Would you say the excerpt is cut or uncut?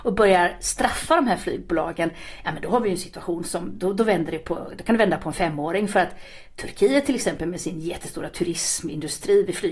uncut